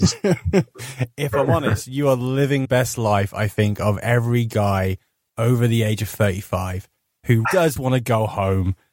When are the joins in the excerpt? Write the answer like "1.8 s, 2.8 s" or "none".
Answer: 2.6 s, 7.4 s, 7.8 s